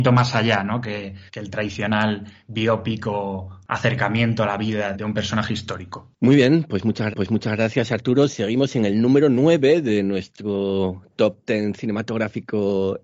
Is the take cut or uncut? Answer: cut